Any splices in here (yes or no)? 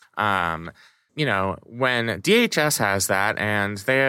yes